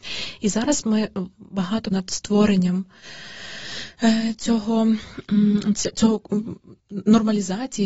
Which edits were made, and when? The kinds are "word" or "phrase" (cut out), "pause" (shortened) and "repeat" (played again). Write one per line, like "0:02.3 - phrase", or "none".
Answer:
0:01.9 - word
0:06.8 - pause